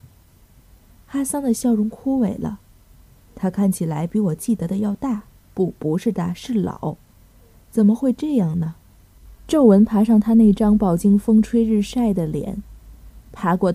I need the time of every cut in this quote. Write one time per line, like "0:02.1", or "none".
0:05.4